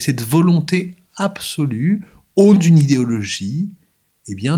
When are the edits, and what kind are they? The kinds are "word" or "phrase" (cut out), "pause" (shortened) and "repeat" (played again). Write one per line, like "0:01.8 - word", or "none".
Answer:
0:02.6 - word